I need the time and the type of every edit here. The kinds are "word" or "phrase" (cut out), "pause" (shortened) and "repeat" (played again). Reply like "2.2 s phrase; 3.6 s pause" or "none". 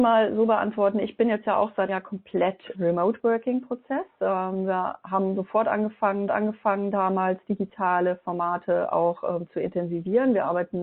1.9 s word; 2.7 s word; 6.3 s repeat